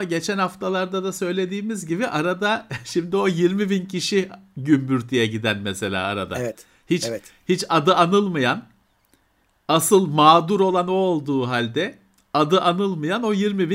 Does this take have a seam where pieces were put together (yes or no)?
no